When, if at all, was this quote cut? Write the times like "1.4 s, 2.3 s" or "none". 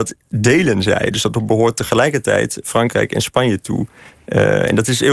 none